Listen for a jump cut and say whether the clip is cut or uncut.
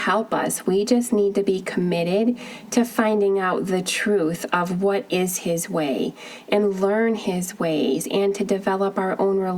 uncut